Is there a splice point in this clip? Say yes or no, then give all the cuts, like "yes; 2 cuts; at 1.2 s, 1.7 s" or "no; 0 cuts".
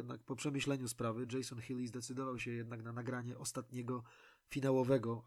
no; 0 cuts